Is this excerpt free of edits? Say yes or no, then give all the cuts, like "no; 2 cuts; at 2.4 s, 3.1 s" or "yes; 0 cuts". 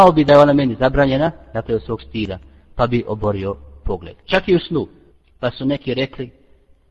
no; 1 cut; at 5.1 s